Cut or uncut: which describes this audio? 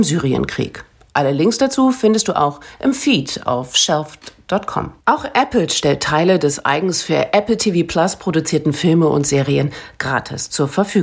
cut